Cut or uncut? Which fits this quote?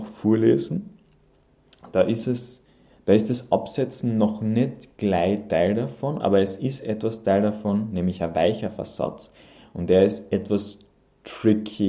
uncut